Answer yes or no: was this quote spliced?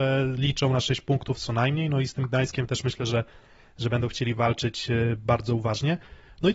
no